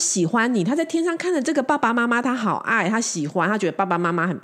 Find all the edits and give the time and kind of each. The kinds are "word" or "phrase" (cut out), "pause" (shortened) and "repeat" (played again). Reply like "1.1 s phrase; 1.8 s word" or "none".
none